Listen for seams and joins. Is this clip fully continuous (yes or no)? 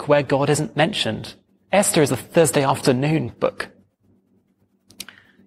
no